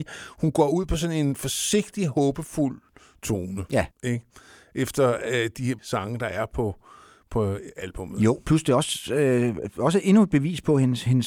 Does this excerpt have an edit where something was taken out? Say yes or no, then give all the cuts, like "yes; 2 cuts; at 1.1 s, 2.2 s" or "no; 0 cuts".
yes; 2 cuts; at 3.9 s, 5.8 s